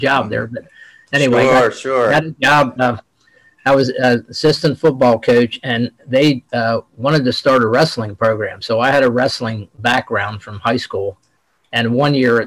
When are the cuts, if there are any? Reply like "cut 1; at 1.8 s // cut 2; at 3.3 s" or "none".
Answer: cut 1; at 2.8 s